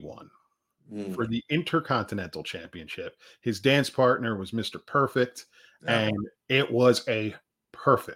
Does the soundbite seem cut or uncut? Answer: uncut